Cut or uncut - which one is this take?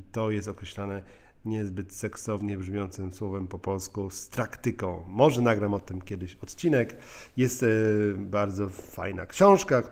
uncut